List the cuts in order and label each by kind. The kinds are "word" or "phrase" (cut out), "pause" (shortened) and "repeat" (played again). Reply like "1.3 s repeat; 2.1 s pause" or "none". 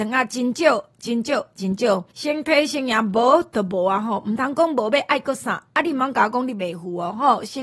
2.1 s pause